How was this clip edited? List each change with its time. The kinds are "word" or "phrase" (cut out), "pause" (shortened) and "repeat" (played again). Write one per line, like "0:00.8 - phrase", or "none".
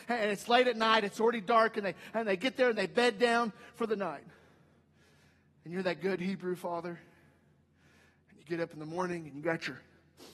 none